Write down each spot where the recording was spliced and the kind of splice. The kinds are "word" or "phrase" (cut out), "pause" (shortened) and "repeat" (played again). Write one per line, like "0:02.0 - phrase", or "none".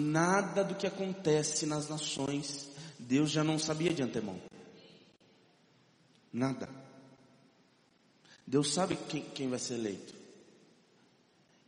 none